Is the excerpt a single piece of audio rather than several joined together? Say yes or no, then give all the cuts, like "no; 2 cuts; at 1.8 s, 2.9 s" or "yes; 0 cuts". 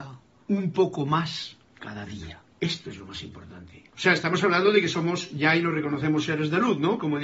no; 2 cuts; at 2.5 s, 3.9 s